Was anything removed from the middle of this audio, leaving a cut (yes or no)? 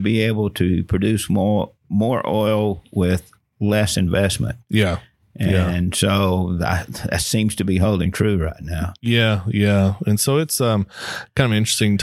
no